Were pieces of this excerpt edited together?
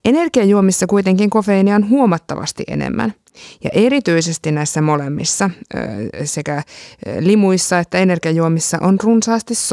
no; 0 cuts

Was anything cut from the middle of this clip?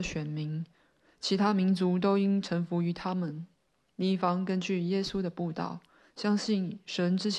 no; 0 cuts

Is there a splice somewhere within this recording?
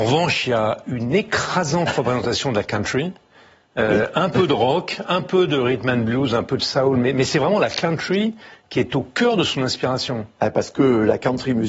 no; 0 cuts

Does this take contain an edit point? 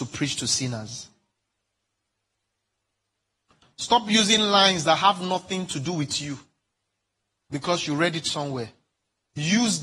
no; 0 cuts

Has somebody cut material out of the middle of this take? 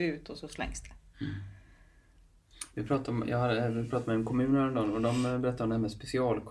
no; 0 cuts

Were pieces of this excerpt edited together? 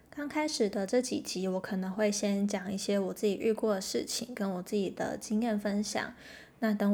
no; 0 cuts

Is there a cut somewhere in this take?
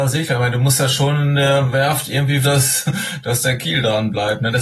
yes; 1 cut; at 2.4 s

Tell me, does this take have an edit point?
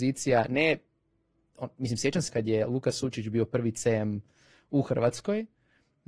yes; 1 cut; at 2.3 s

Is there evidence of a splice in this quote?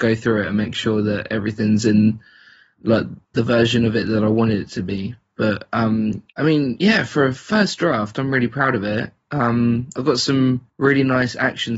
yes; 3 cuts; at 3.2 s, 6.3 s, 10.7 s

